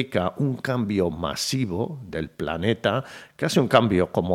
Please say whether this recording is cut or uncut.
uncut